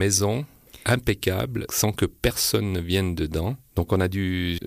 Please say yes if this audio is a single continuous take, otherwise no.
no